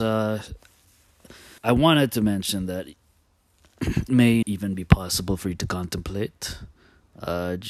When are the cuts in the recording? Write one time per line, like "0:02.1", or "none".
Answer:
0:01.6
0:04.1
0:04.4